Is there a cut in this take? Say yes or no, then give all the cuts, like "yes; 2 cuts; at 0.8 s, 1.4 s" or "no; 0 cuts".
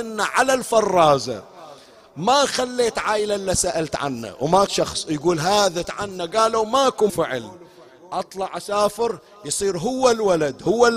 yes; 3 cuts; at 4.7 s, 5.8 s, 7.1 s